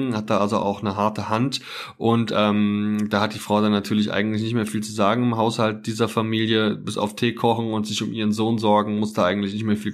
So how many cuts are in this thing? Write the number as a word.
zero